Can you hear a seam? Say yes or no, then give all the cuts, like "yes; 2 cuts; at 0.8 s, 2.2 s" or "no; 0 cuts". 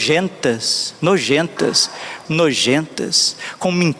yes; 1 cut; at 2.3 s